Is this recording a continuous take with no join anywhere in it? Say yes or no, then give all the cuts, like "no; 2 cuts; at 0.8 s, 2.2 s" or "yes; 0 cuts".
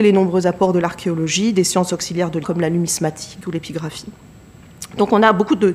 no; 1 cut; at 2.4 s